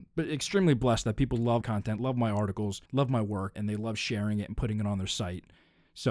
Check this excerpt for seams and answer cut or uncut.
cut